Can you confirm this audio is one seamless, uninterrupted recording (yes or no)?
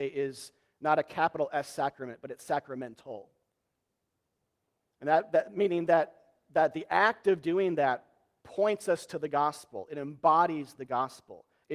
yes